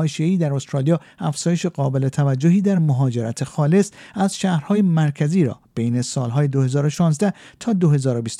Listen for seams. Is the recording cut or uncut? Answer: uncut